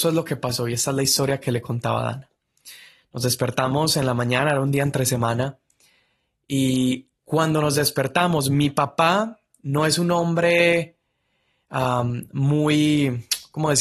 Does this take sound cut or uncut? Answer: uncut